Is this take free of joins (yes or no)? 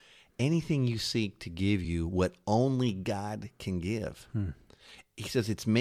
yes